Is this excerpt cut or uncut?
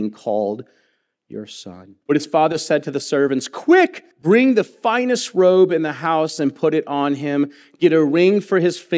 cut